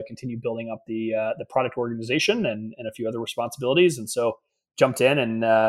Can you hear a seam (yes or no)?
no